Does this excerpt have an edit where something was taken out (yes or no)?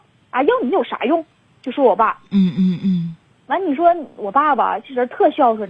no